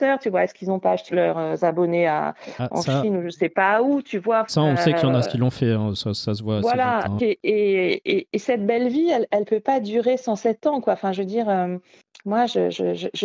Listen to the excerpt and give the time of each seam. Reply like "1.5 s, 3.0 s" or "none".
1.1 s, 4.5 s, 5.2 s, 7.2 s